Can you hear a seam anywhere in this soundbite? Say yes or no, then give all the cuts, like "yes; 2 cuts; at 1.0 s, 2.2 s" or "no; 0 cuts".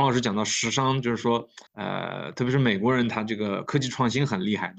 yes; 1 cut; at 1.7 s